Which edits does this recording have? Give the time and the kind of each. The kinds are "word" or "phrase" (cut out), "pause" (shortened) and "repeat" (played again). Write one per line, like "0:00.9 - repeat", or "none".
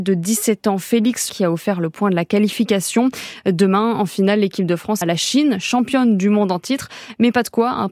0:01.3 - word
0:05.0 - word